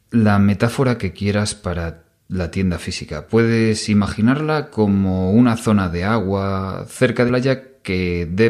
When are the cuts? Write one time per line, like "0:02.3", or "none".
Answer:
0:07.3